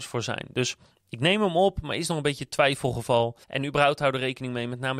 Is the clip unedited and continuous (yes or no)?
no